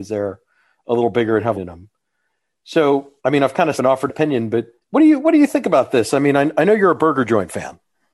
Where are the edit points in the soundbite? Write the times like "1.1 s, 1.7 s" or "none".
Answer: 1.5 s, 3.2 s, 3.8 s, 4.1 s, 4.8 s